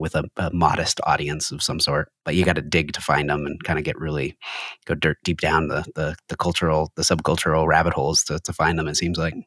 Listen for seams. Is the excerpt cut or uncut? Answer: uncut